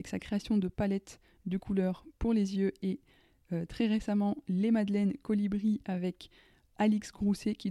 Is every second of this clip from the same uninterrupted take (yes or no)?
yes